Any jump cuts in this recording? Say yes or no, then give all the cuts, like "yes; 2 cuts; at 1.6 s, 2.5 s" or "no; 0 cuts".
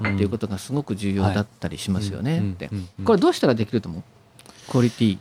no; 0 cuts